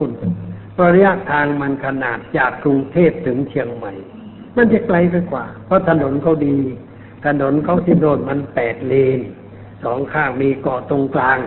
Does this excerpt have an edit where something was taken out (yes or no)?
yes